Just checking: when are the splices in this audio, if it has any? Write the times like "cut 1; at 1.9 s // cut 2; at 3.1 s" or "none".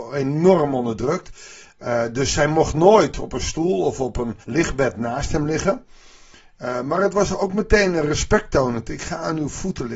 cut 1; at 4.4 s